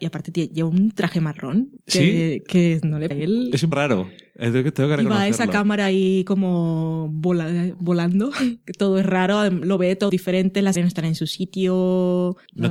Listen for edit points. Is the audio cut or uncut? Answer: cut